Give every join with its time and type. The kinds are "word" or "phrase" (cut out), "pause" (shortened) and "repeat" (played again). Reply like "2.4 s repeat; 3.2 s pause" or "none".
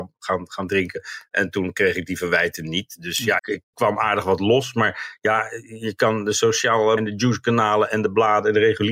3.4 s word; 3.7 s word; 7.0 s word